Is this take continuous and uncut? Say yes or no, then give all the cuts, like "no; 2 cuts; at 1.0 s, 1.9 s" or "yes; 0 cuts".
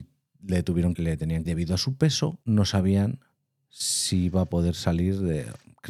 no; 3 cuts; at 1.0 s, 1.5 s, 2.4 s